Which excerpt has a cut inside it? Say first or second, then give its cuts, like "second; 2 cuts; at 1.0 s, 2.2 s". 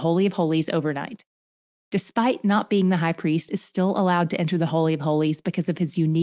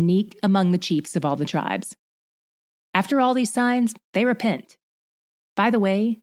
first; 1 cut; at 3.5 s